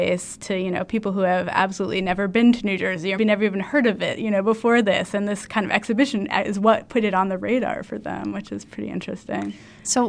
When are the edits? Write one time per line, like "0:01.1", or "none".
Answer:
0:03.2